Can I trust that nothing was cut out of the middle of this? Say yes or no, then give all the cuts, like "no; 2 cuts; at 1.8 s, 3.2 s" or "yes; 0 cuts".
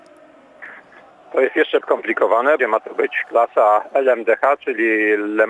no; 2 cuts; at 1.8 s, 2.6 s